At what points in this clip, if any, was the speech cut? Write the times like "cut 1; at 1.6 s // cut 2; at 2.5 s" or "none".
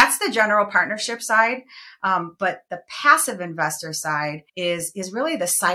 cut 1; at 4.5 s